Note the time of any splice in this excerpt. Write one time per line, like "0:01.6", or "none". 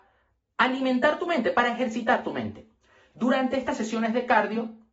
none